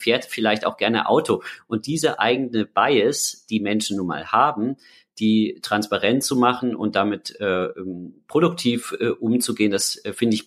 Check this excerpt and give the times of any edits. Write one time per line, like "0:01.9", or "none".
none